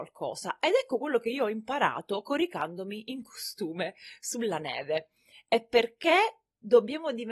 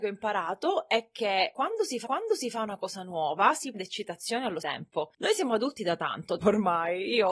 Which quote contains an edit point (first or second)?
second